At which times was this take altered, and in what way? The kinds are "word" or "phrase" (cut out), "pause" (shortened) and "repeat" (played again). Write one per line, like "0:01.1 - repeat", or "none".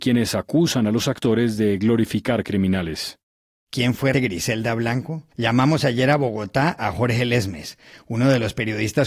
0:04.1 - word
0:05.3 - pause